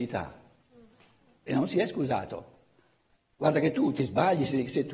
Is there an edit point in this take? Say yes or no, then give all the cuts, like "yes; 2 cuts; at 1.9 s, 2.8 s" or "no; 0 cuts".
no; 0 cuts